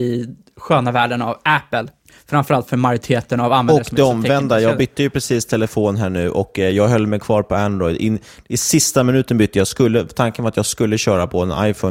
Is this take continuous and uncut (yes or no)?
yes